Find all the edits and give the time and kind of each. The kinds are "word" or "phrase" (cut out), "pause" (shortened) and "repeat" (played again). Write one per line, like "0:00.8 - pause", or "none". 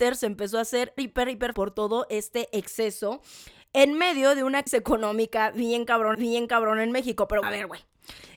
0:01.0 - word
0:01.5 - word
0:04.7 - word
0:06.1 - repeat
0:07.4 - word